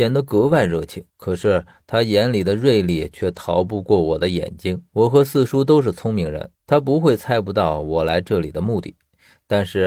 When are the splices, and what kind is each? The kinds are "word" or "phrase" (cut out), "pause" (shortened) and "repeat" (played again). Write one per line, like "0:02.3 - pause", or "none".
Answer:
0:01.1 - pause
0:04.9 - pause
0:06.6 - pause